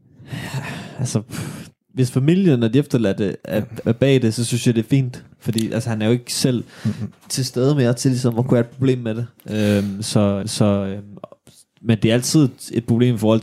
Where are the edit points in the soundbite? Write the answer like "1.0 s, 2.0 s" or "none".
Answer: 3.8 s, 5.3 s, 10.4 s